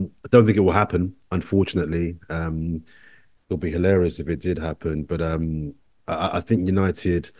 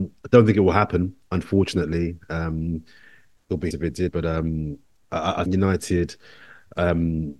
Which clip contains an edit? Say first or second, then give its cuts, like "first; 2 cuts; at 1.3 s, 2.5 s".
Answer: second; 3 cuts; at 3.7 s, 4.1 s, 5.5 s